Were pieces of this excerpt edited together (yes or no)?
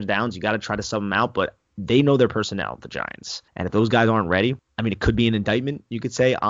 yes